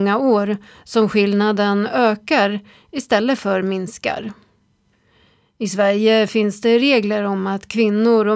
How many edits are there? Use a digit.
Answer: 0